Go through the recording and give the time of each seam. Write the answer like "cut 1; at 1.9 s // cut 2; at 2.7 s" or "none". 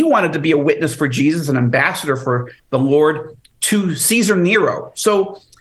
cut 1; at 2.6 s